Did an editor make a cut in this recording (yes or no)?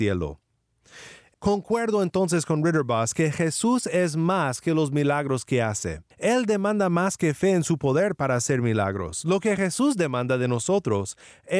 yes